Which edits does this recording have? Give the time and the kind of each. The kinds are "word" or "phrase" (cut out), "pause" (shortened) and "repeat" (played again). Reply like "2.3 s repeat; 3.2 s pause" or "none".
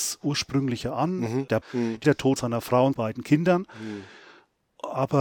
1.6 s word; 2.0 s word; 2.4 s word; 2.9 s word